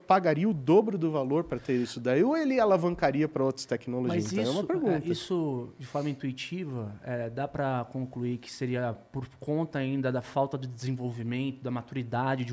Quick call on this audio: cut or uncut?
uncut